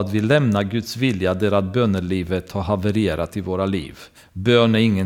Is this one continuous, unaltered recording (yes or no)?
no